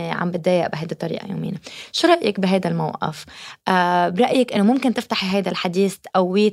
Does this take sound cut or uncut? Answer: uncut